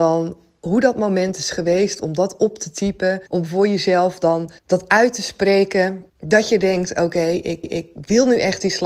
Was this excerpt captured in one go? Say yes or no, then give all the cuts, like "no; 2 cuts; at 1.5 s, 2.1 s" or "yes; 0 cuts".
no; 4 cuts; at 3.3 s, 4.6 s, 6.1 s, 7.6 s